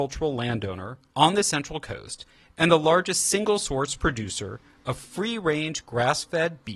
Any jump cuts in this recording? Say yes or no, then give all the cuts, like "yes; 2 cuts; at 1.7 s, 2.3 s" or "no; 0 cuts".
no; 0 cuts